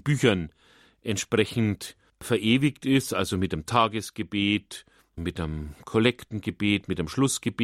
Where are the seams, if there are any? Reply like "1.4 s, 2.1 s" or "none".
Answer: 5.0 s